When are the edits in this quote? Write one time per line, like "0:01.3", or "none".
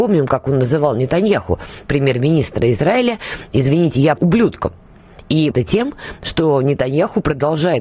0:04.2
0:05.5